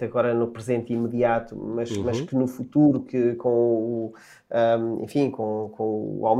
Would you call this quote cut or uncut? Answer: uncut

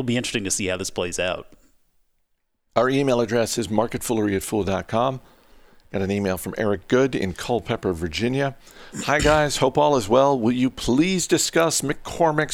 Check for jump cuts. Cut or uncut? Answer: uncut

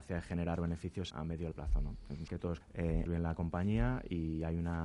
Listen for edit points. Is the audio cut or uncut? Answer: cut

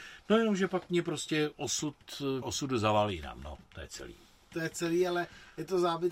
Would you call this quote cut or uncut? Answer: cut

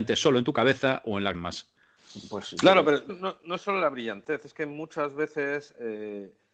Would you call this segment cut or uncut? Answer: cut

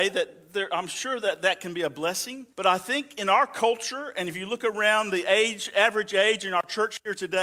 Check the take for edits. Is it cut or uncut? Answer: cut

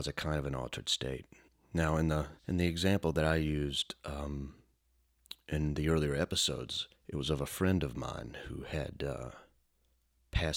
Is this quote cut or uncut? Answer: cut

